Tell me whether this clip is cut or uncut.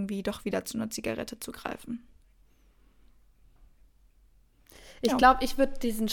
uncut